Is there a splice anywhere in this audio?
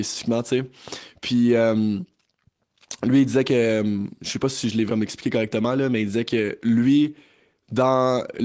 yes; 1 cut; at 4.9 s

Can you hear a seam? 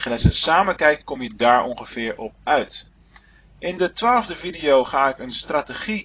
no; 0 cuts

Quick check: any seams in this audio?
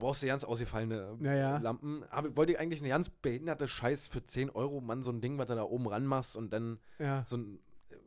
no; 0 cuts

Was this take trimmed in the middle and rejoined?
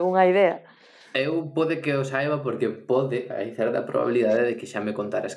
no; 0 cuts

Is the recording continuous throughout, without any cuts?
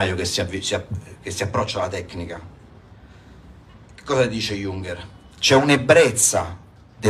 yes; 0 cuts

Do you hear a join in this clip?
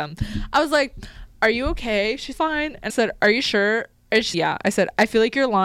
yes; 3 cuts; at 2.3 s, 2.9 s, 4.3 s

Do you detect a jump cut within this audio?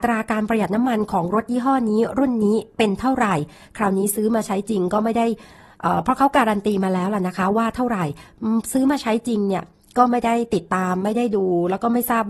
no; 0 cuts

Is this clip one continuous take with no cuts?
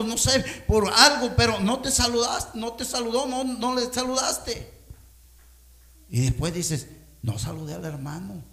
yes; 0 cuts

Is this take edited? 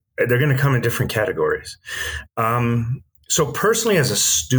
no; 0 cuts

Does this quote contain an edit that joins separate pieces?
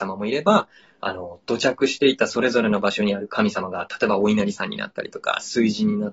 no; 0 cuts

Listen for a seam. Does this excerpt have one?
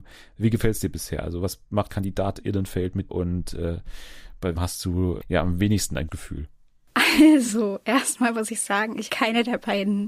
yes; 6 cuts; at 1.9 s, 3.1 s, 4.6 s, 5.2 s, 6.1 s, 9.1 s

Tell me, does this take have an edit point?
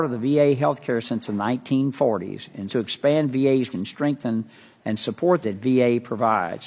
yes; 4 cuts; at 1.0 s, 2.7 s, 3.7 s, 5.4 s

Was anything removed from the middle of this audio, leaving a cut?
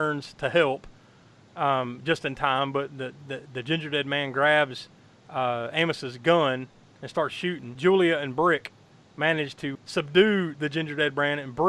no; 0 cuts

